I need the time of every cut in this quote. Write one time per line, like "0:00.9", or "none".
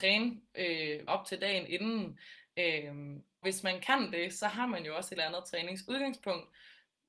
0:01.1
0:03.4
0:05.2